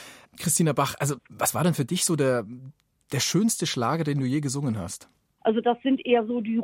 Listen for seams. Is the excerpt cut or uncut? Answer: uncut